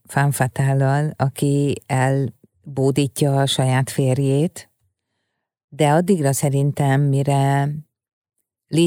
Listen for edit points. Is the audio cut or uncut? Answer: uncut